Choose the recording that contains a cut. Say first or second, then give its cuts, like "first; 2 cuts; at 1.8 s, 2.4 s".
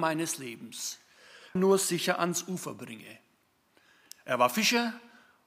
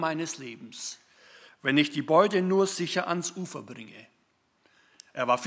first; 1 cut; at 1.6 s